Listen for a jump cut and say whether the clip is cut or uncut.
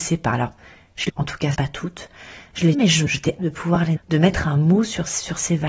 cut